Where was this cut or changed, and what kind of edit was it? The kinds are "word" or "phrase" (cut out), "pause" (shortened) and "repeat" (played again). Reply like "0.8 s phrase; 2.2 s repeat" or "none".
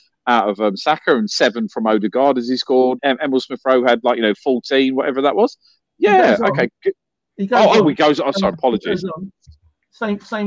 3.0 s word; 8.5 s word